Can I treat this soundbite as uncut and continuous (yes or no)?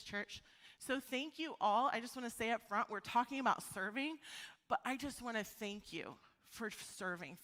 yes